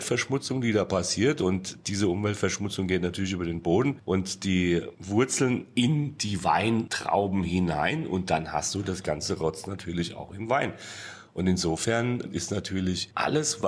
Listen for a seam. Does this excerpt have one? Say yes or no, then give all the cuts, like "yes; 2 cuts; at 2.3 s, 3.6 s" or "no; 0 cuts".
no; 0 cuts